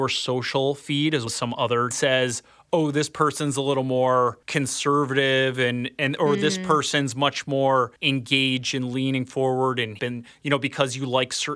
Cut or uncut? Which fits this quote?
cut